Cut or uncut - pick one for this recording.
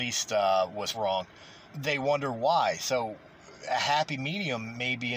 cut